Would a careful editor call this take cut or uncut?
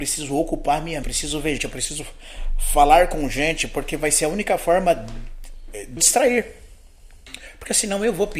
cut